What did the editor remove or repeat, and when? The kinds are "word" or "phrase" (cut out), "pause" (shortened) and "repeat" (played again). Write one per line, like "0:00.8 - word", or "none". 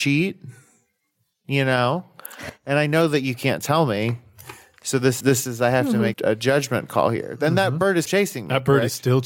0:05.2 - word
0:06.1 - word
0:08.0 - word